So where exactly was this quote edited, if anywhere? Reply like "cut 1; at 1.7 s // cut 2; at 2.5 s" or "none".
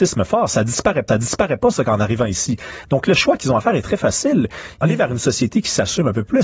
cut 1; at 1.1 s // cut 2; at 4.8 s